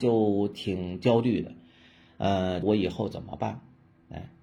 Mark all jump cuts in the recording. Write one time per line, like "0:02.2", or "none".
0:02.6